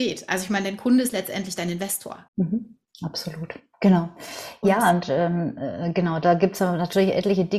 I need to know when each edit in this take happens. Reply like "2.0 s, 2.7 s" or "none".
2.3 s